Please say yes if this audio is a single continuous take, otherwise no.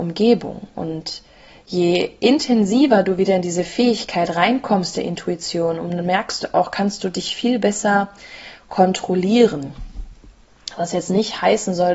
yes